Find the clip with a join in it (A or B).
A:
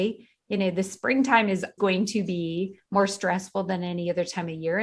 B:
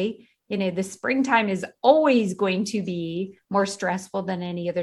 A